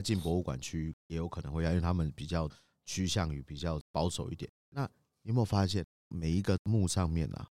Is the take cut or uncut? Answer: cut